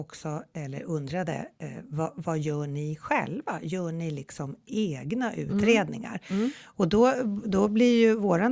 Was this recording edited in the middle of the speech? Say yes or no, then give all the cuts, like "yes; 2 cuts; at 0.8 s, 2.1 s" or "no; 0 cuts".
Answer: yes; 1 cut; at 7.4 s